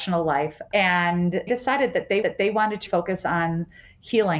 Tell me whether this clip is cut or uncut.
cut